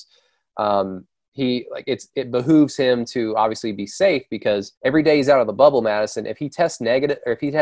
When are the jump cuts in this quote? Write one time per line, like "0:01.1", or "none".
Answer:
0:04.8

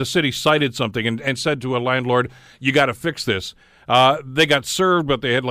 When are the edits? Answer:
none

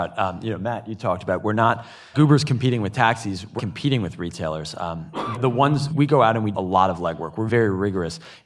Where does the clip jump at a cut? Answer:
0:02.1
0:03.6
0:05.3
0:05.9
0:06.5
0:07.5

